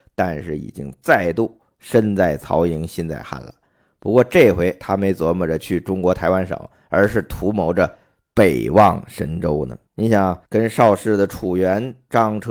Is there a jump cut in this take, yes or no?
yes